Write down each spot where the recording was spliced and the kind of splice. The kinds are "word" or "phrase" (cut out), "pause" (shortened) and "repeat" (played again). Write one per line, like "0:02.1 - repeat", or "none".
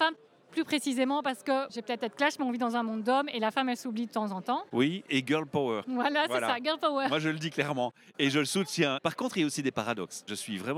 0:01.7 - word